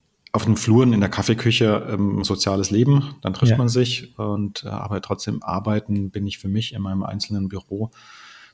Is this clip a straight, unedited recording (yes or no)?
no